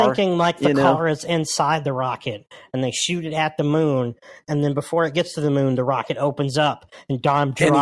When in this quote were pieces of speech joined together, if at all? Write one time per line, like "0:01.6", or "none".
none